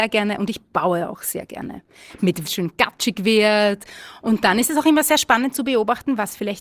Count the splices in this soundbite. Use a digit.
1